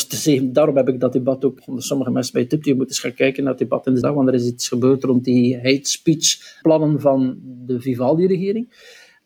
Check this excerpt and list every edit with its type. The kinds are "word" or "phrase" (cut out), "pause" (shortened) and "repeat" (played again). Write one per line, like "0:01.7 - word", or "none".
0:01.6 - word
0:04.0 - word
0:06.6 - word